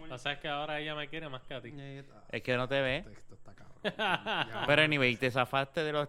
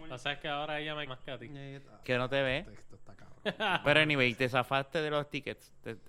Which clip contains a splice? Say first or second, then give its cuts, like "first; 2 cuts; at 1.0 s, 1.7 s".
second; 3 cuts; at 1.1 s, 2.0 s, 3.8 s